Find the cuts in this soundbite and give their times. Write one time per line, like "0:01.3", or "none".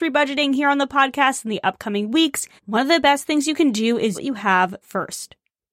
0:02.6
0:04.1
0:04.8